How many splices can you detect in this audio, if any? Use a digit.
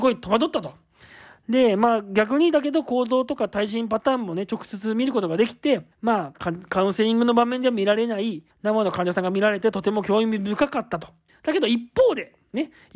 3